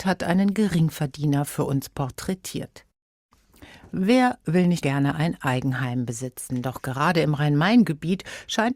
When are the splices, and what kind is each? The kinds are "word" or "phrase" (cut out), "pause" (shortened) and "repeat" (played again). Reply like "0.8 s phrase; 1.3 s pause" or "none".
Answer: 4.8 s word